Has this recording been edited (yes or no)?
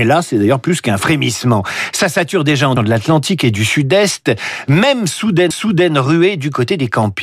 yes